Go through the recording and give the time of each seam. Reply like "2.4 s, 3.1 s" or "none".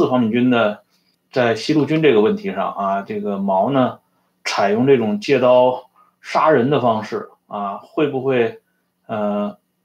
1.1 s